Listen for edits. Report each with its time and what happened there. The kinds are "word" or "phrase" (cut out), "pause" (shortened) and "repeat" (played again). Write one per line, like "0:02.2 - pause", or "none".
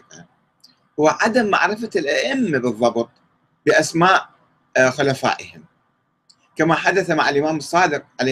none